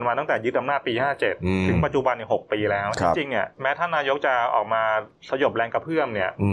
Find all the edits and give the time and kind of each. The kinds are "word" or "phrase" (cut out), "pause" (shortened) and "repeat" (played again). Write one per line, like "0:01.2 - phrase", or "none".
0:03.5 - pause
0:05.1 - pause